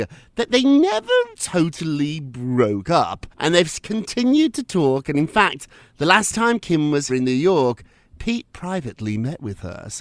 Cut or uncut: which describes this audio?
cut